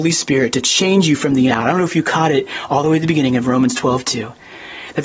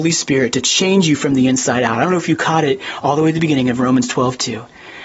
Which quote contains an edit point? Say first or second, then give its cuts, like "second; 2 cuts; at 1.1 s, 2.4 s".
first; 1 cut; at 1.5 s